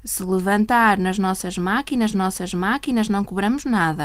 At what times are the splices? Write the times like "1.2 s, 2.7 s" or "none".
2.1 s